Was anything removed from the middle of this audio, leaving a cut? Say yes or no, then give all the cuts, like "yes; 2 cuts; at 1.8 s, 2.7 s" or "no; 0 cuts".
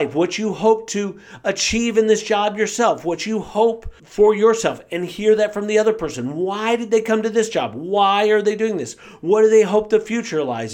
yes; 1 cut; at 4.0 s